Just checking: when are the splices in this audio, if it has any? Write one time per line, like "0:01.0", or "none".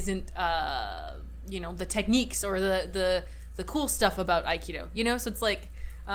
none